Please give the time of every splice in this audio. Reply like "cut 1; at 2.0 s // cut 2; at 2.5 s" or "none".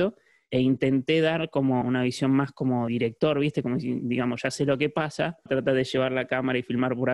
cut 1; at 1.8 s // cut 2; at 2.9 s // cut 3; at 5.5 s